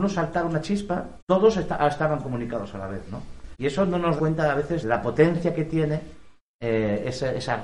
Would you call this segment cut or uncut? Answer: cut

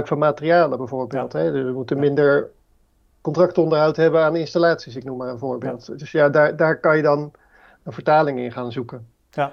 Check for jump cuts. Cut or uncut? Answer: uncut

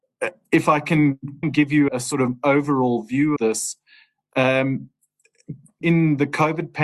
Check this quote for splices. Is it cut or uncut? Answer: cut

